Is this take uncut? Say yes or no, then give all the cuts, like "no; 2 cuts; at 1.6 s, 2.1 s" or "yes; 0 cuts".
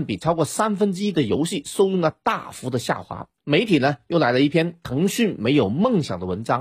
no; 1 cut; at 3.4 s